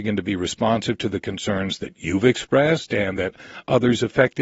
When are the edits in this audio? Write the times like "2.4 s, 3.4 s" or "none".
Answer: none